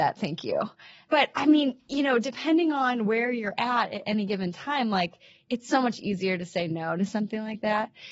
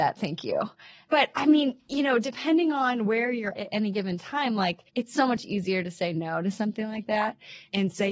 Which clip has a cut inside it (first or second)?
second